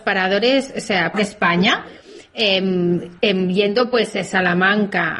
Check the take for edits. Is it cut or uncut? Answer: cut